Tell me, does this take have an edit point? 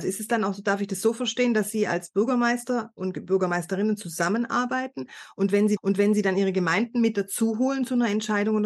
yes; 1 cut; at 5.8 s

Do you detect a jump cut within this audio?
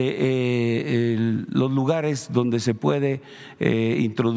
no; 0 cuts

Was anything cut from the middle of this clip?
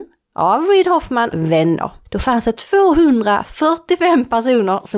yes; 1 cut; at 1.3 s

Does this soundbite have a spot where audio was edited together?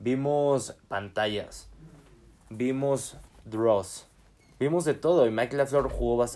no; 0 cuts

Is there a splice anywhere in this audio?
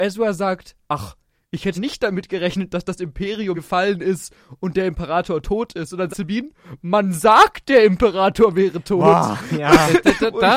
yes; 3 cuts; at 1.7 s, 3.5 s, 6.1 s

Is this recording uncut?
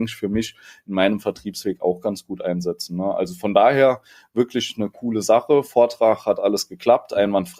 yes; 0 cuts

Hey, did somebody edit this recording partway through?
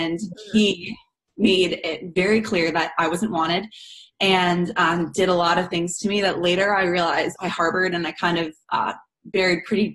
yes; 1 cut; at 7.3 s

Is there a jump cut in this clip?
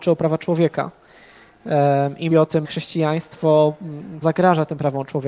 yes; 3 cuts; at 2.3 s, 2.6 s, 4.2 s

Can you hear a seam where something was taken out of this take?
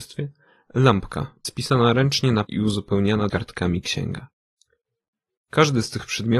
yes; 3 cuts; at 1.4 s, 2.4 s, 3.3 s

